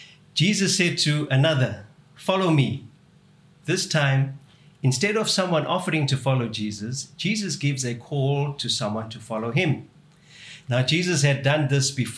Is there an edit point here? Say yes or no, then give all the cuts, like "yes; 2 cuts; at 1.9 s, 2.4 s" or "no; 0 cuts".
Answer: no; 0 cuts